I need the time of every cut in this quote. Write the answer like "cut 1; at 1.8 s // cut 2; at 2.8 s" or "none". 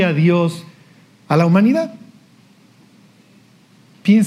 none